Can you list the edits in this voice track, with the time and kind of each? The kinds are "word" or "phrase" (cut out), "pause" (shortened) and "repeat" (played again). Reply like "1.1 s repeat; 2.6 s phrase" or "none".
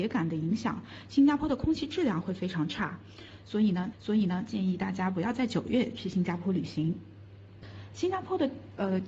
3.9 s repeat